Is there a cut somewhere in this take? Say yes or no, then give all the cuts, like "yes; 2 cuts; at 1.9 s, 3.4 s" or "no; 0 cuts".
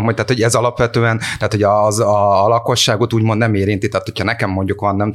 no; 0 cuts